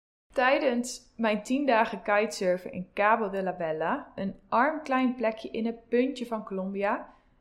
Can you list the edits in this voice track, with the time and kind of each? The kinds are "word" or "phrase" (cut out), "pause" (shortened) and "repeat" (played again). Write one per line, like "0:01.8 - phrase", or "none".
none